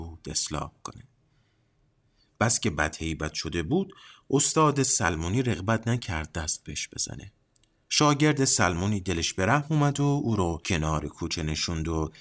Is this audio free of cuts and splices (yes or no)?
yes